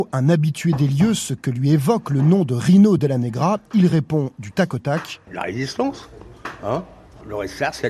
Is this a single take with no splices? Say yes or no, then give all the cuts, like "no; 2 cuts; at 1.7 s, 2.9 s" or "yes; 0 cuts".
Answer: yes; 0 cuts